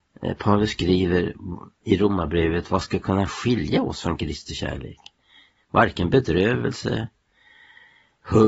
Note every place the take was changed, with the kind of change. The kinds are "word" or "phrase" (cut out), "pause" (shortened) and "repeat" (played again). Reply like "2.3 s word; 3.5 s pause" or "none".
none